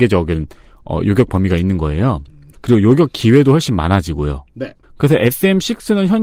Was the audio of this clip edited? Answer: no; 0 cuts

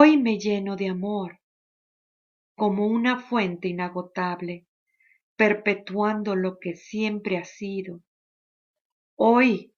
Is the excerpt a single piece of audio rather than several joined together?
yes; 0 cuts

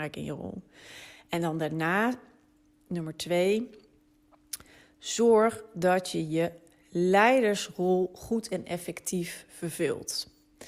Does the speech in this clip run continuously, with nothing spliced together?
yes; 0 cuts

